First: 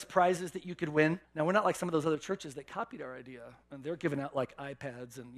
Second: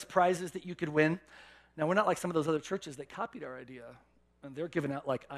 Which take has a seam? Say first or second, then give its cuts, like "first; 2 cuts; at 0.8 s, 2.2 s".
first; 2 cuts; at 1.2 s, 3.6 s